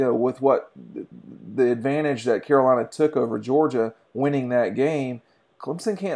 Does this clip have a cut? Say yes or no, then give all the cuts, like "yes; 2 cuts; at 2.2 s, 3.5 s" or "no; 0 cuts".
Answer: no; 0 cuts